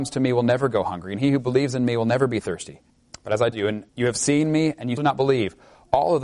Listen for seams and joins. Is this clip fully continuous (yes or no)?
no